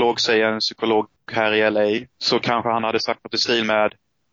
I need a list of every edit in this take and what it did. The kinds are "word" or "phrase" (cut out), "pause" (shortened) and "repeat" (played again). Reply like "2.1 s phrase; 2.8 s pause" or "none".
2.1 s pause